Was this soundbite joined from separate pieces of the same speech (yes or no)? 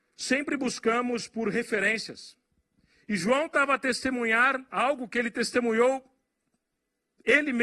no